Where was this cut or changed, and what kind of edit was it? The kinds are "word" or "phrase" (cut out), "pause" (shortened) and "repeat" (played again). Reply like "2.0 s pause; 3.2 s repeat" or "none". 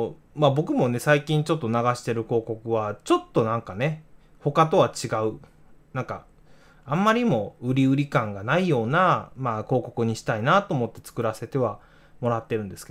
none